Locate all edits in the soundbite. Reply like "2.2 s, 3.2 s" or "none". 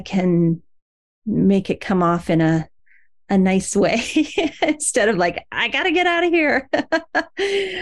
none